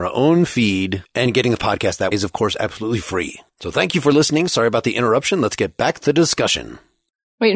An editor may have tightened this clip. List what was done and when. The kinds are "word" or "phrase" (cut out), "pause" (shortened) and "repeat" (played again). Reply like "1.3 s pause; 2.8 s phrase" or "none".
2.1 s word